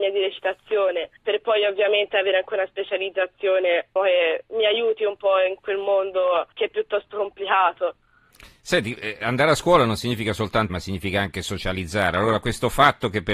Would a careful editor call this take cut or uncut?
cut